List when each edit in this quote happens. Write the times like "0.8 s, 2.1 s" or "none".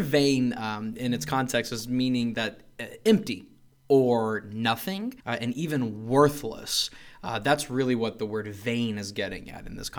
5.2 s